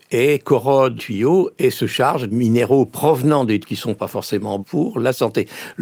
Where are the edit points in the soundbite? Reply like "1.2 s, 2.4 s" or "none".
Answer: 1.0 s, 2.3 s, 3.6 s, 4.6 s

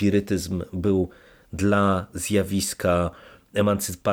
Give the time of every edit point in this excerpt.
none

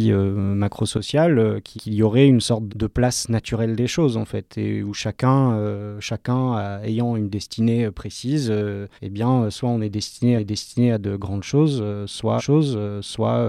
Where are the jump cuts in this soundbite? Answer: 1.8 s, 2.7 s, 9.0 s, 10.4 s, 12.4 s

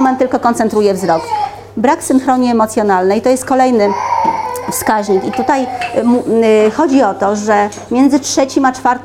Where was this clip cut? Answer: none

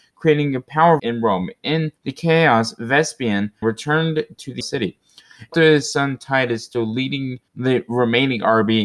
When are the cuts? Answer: 1.0 s, 2.0 s, 3.6 s, 4.6 s, 5.5 s, 7.5 s

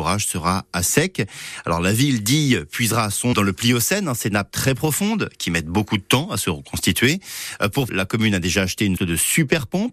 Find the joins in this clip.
3.3 s, 7.9 s, 9.0 s

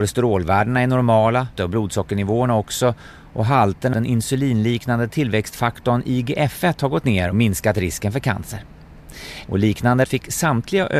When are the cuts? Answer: 1.6 s, 3.9 s, 7.3 s, 10.0 s

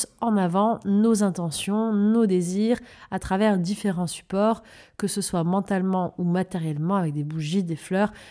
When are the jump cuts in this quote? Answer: none

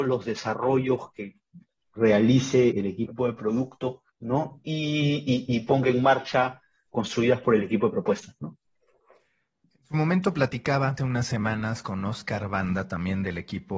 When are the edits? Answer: 2.7 s, 4.1 s, 6.9 s, 11.0 s

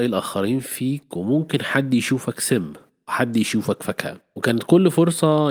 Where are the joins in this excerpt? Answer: none

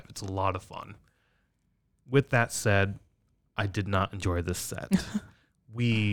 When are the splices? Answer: none

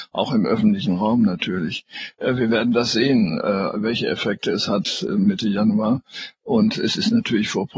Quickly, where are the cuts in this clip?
none

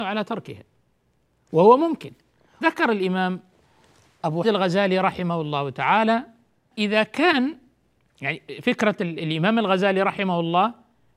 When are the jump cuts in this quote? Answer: 2.6 s, 4.4 s, 6.7 s

